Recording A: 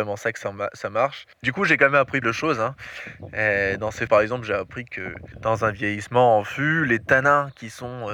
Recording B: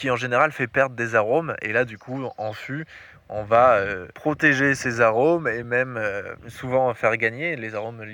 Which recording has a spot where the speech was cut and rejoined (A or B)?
A